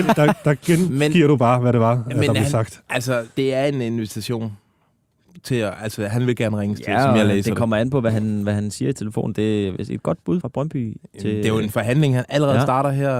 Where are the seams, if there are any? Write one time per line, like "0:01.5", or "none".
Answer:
0:03.3
0:10.4